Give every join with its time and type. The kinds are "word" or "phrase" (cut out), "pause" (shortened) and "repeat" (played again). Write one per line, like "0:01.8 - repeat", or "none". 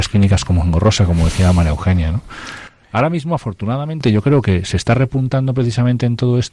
none

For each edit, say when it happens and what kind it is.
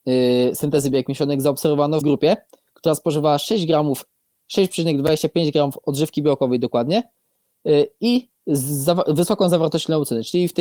0:02.0 - word
0:08.4 - pause

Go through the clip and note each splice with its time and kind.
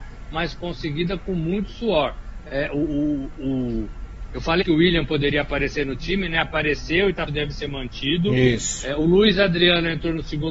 0:04.6 - word
0:07.3 - phrase

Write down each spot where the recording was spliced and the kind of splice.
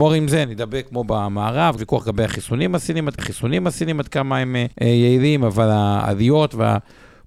0:01.8 - phrase
0:03.2 - repeat
0:04.7 - pause

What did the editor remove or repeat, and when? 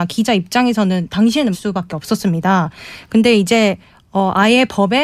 0:01.5 - word

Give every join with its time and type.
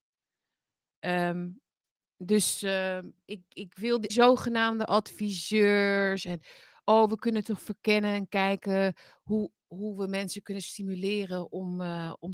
0:03.5 - word
0:04.1 - phrase

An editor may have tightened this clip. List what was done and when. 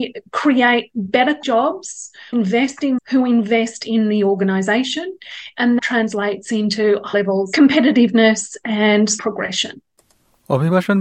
0:01.4 - word
0:02.3 - word
0:03.0 - word
0:05.8 - word
0:07.1 - word
0:07.5 - word
0:09.2 - word

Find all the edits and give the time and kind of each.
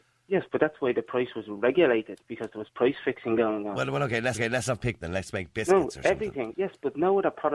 0:04.3 - repeat
0:05.0 - word

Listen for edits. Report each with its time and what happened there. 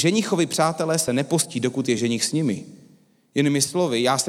none

